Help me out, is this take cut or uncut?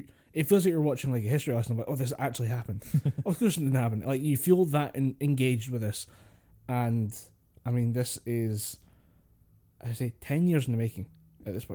uncut